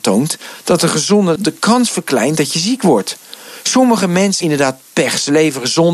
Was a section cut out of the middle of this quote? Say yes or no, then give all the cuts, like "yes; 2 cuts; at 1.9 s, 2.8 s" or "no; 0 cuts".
yes; 2 cuts; at 1.4 s, 4.4 s